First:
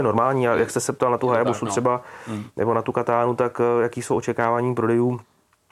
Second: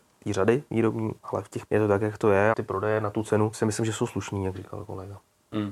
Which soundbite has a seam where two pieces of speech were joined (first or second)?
second